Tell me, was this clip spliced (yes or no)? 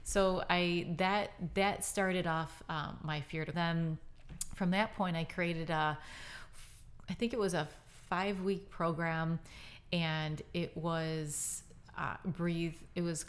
yes